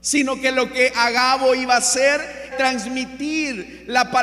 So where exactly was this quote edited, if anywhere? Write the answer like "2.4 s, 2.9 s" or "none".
2.5 s